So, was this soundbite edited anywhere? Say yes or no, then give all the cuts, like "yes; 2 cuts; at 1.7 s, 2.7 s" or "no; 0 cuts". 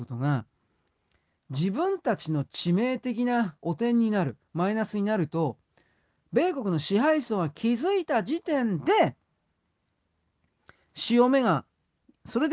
no; 0 cuts